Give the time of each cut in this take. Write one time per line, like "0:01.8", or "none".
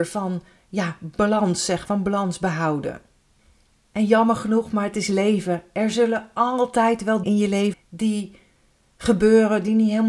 0:01.9
0:07.2
0:07.7